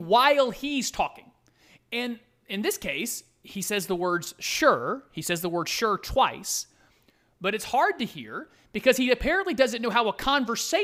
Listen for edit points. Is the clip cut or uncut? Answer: uncut